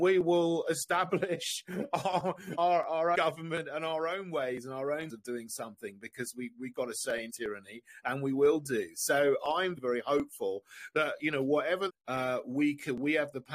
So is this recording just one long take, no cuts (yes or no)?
no